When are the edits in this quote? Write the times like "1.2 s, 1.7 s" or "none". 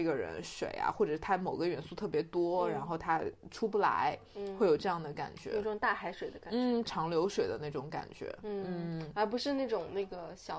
6.8 s